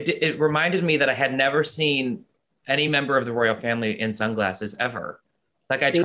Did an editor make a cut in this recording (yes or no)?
no